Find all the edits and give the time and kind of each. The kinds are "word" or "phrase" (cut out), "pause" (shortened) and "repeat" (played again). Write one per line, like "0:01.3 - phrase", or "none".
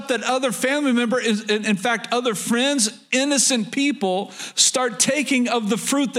none